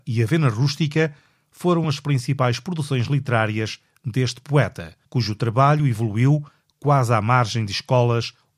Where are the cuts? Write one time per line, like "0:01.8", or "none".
none